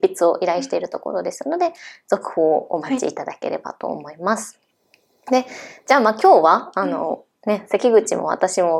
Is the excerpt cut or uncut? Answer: uncut